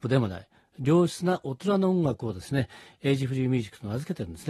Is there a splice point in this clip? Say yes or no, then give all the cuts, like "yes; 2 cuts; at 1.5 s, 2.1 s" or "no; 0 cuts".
no; 0 cuts